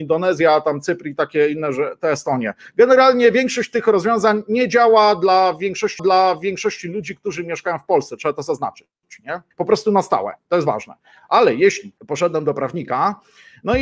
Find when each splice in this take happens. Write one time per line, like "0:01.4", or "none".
0:06.0
0:09.5
0:12.0